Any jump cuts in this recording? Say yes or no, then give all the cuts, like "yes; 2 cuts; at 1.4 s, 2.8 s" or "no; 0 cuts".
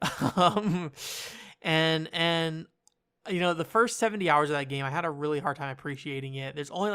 no; 0 cuts